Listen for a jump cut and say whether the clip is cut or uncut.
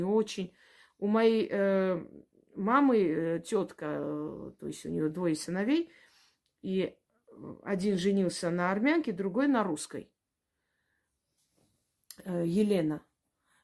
uncut